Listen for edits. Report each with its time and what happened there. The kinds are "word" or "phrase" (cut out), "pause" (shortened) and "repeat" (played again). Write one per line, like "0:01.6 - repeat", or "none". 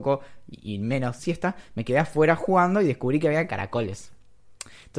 0:01.2 - phrase